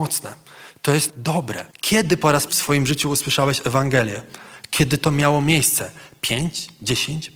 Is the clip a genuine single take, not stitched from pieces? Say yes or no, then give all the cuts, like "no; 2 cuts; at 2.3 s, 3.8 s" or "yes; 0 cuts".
no; 3 cuts; at 1.1 s, 1.7 s, 2.5 s